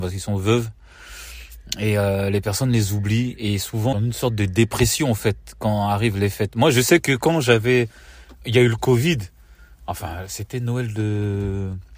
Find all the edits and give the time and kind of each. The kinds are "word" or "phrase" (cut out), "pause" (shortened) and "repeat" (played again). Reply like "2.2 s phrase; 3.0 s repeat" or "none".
3.9 s phrase